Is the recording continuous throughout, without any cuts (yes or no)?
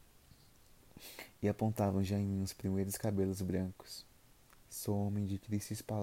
yes